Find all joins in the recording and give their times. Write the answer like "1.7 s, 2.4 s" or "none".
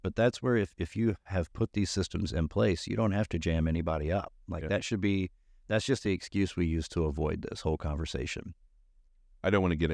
none